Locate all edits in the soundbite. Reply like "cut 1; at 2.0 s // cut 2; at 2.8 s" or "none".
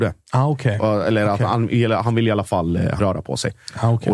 cut 1; at 3.0 s